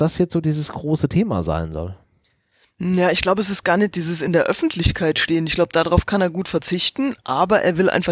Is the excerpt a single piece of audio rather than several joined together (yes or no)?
yes